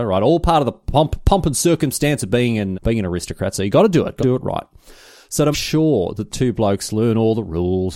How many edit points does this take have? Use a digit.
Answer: 4